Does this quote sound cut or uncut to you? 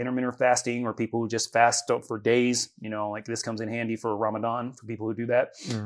uncut